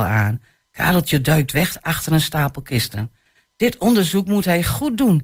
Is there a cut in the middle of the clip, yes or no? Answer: no